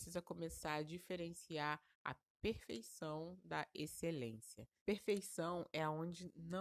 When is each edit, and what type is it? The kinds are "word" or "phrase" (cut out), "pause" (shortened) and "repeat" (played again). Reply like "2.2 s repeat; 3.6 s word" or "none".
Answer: 1.9 s pause; 4.8 s pause